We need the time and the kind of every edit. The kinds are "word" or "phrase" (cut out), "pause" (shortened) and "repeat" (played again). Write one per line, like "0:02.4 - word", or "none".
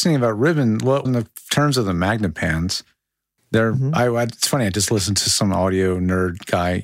0:01.0 - word